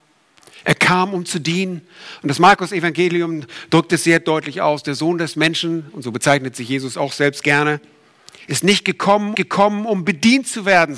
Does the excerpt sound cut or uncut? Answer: cut